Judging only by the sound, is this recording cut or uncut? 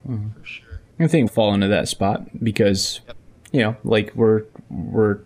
cut